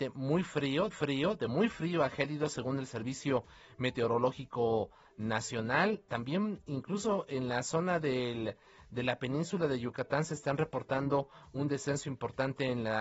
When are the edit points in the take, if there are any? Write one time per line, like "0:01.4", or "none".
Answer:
0:00.9